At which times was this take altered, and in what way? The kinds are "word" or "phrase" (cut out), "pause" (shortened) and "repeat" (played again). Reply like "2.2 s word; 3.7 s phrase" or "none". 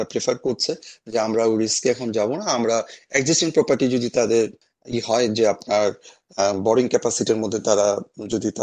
none